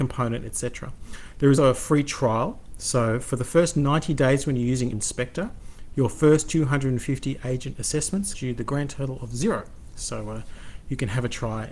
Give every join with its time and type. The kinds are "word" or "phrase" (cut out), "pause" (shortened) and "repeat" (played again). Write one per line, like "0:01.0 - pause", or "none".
0:01.6 - word
0:04.9 - word
0:08.3 - word